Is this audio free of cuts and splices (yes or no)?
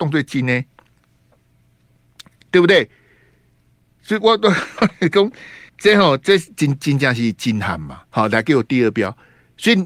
no